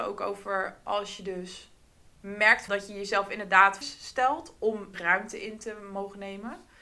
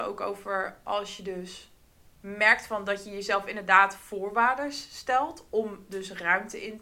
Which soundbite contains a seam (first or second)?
first